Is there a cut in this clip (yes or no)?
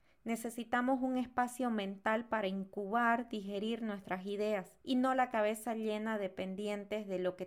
yes